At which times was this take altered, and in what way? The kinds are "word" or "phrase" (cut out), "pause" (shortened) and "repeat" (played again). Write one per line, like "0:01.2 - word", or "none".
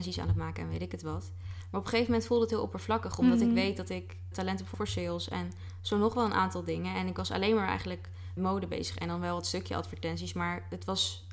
0:04.3 - word
0:04.7 - phrase
0:08.4 - word